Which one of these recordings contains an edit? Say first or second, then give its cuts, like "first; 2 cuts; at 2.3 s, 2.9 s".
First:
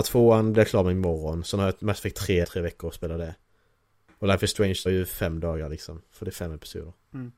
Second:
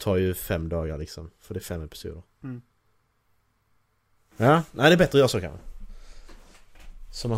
first; 2 cuts; at 2.4 s, 4.9 s